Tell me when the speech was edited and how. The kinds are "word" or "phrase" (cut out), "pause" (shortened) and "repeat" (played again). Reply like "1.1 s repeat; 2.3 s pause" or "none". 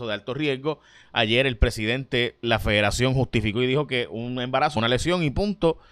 2.4 s word; 4.8 s phrase